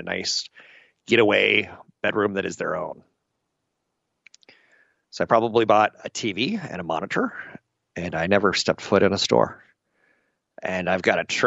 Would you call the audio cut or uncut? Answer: uncut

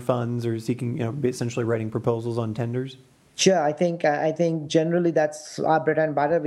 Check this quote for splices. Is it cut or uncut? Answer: uncut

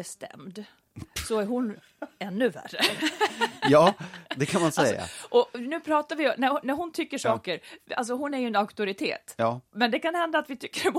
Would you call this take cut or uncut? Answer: uncut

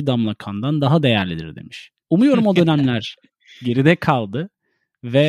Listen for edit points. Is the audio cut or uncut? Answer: uncut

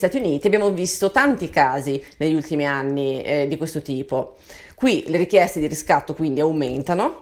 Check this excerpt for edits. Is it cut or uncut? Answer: uncut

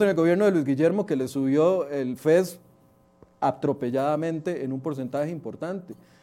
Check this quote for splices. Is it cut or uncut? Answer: uncut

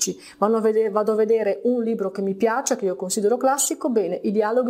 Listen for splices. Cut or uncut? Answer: uncut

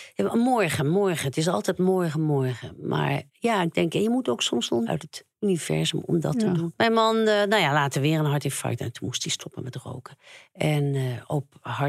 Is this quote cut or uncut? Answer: cut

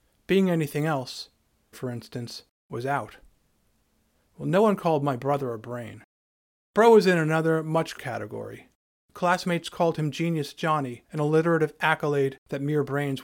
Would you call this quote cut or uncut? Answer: cut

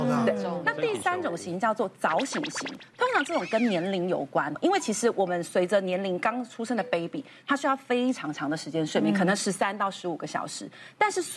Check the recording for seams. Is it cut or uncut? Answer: uncut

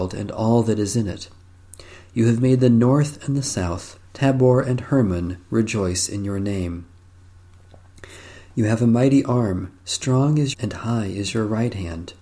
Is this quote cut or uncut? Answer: cut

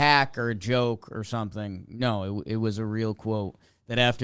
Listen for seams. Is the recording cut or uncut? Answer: uncut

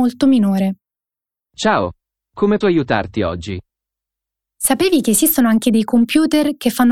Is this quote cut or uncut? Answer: cut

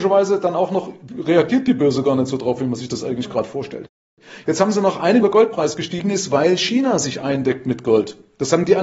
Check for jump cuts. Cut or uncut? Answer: cut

